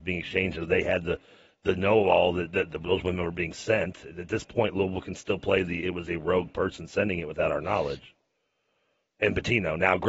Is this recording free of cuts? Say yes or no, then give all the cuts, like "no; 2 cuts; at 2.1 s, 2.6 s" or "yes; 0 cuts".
yes; 0 cuts